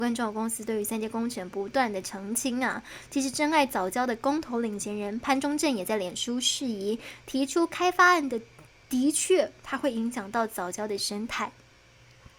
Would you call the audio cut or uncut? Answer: uncut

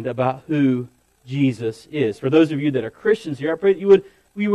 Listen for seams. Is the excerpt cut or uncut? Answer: uncut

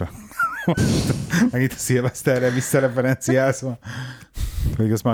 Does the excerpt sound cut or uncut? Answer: uncut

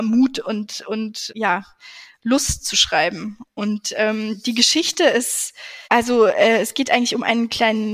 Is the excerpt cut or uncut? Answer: cut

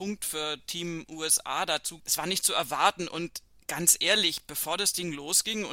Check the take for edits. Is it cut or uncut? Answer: cut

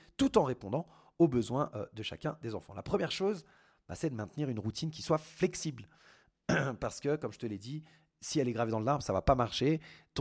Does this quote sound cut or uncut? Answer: uncut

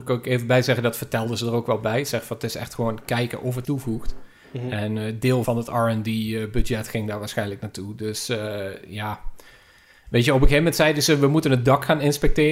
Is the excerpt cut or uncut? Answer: cut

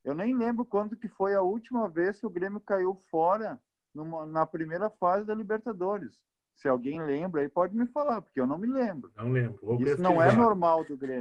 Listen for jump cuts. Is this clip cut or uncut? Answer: uncut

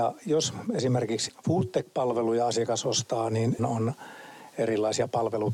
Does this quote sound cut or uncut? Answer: cut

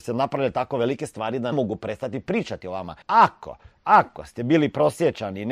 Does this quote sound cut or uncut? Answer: cut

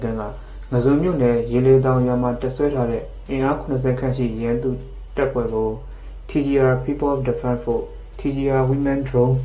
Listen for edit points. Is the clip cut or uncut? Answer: uncut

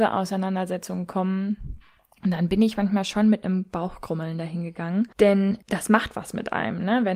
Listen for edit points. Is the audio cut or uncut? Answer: uncut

